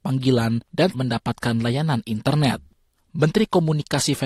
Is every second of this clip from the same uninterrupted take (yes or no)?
no